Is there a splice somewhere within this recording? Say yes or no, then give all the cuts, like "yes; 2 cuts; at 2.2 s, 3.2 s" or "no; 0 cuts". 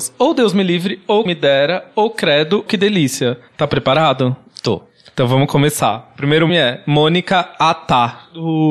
yes; 3 cuts; at 1.3 s, 2.7 s, 6.5 s